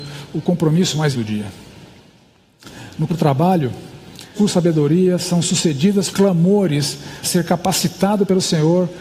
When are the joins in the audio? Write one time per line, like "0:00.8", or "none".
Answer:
0:01.1
0:03.1
0:04.4
0:06.1
0:07.2